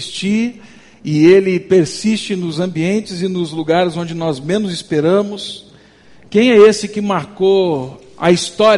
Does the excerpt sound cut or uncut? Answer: uncut